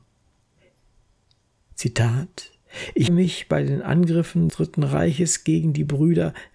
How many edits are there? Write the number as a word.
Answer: two